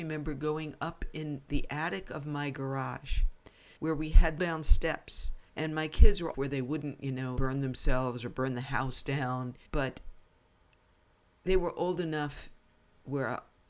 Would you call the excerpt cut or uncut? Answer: cut